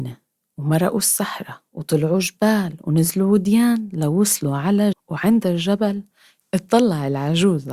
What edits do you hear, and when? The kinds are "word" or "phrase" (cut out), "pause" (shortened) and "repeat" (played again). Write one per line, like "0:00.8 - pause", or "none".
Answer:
0:04.9 - word
0:05.4 - word